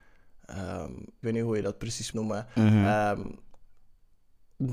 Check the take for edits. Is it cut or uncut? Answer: cut